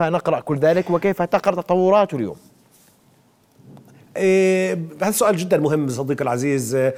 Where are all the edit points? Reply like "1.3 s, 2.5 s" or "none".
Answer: none